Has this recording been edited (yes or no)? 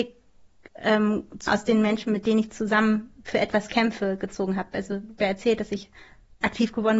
yes